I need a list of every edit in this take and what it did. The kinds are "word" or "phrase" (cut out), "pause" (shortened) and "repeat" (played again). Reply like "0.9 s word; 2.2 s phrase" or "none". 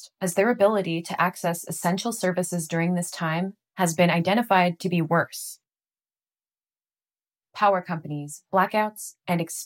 none